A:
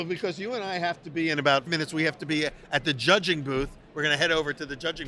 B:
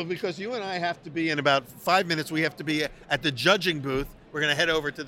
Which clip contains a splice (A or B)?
A